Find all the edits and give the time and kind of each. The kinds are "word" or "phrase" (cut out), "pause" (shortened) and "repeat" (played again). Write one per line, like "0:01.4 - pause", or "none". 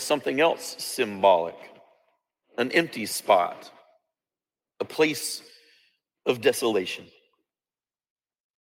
none